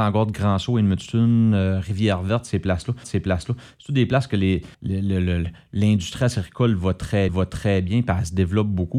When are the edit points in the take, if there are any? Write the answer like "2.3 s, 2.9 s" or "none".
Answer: 3.0 s, 4.7 s, 7.3 s